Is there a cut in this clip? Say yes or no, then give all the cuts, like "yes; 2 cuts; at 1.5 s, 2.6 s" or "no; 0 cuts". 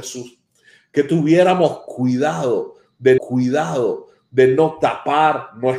yes; 1 cut; at 3.2 s